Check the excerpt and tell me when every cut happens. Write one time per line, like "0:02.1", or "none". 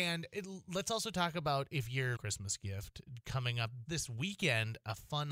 0:02.2
0:03.9